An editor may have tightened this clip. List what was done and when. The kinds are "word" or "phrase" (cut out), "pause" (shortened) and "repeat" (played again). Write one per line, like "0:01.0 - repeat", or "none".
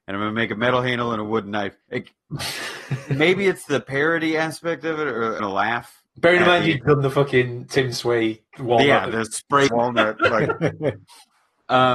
0:01.8 - pause
0:05.4 - phrase
0:06.1 - pause
0:06.8 - word
0:08.5 - pause
0:09.7 - word

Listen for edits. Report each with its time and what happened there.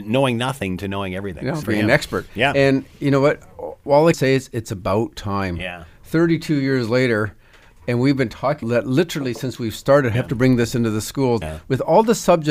0:01.6 - word
0:04.1 - word
0:08.6 - word
0:10.1 - word
0:11.4 - word

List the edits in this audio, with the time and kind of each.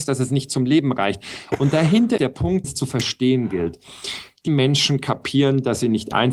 0:02.2 - word
0:02.6 - word
0:04.5 - word

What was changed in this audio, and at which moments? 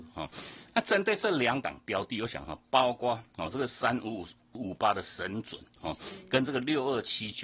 none

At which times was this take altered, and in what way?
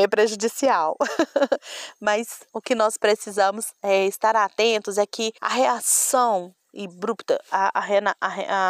0:02.5 - pause
0:05.4 - pause

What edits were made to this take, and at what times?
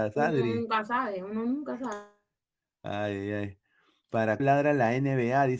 0:04.4 - word

